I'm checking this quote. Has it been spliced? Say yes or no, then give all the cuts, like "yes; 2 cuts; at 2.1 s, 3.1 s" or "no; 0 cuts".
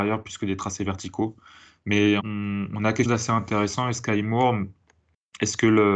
yes; 2 cuts; at 2.2 s, 3.1 s